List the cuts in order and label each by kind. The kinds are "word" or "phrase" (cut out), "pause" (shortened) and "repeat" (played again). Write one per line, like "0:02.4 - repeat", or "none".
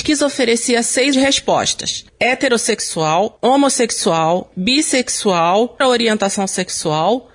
0:01.1 - word
0:05.8 - word